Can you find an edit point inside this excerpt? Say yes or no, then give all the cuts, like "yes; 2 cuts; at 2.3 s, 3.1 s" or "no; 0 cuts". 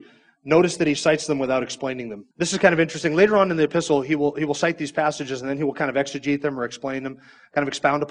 yes; 1 cut; at 2.3 s